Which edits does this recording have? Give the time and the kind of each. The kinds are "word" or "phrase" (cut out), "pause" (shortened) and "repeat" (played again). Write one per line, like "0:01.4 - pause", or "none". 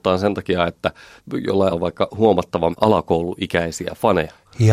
0:01.7 - word
0:02.7 - word